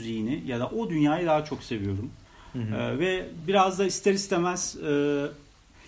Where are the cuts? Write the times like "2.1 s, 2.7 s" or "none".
none